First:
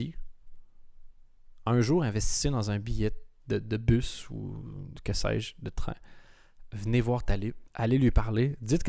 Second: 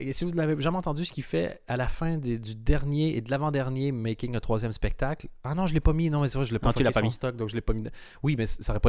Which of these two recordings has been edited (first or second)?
first